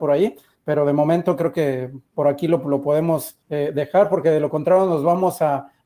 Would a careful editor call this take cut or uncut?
cut